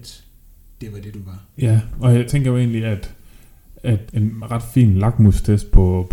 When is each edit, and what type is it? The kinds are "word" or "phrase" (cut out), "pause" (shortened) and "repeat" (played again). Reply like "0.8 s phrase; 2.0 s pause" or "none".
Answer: 2.3 s phrase; 4.1 s word